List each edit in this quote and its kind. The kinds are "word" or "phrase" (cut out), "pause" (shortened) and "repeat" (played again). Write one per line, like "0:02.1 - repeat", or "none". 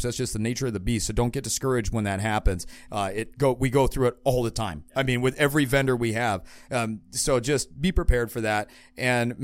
none